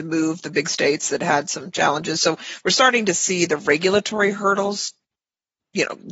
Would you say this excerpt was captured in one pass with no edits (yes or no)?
yes